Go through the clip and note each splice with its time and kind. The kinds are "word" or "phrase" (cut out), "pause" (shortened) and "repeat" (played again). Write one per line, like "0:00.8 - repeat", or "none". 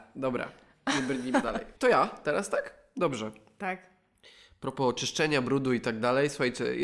0:01.4 - word
0:01.8 - pause